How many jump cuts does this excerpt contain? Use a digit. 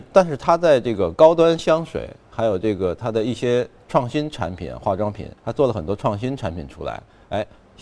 1